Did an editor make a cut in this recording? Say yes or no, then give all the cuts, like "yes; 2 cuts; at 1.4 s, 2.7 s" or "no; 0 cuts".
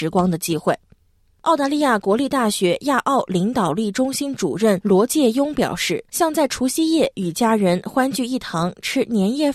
yes; 1 cut; at 6.1 s